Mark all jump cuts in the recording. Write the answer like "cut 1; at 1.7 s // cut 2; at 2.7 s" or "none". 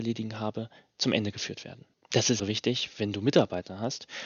cut 1; at 1.9 s // cut 2; at 2.4 s